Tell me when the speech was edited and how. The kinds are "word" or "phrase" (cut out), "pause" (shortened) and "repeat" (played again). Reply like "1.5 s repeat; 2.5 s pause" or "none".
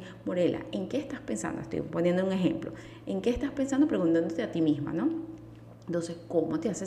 none